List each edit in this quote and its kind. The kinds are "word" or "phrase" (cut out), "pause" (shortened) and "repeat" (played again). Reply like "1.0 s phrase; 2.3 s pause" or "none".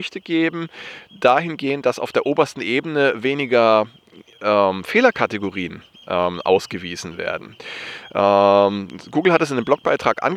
1.1 s pause